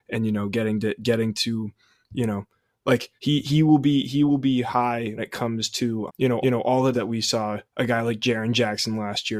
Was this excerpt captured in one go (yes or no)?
no